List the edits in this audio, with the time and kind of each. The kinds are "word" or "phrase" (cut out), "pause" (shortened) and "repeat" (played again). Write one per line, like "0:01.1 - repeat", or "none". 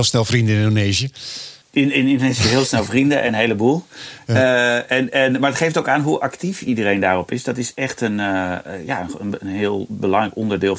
none